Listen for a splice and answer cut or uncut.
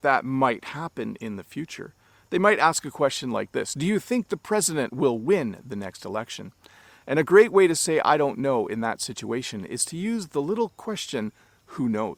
uncut